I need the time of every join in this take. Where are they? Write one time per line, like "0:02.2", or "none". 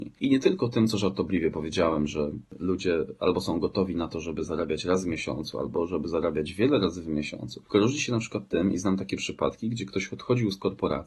none